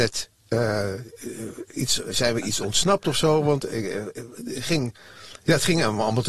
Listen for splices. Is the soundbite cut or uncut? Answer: uncut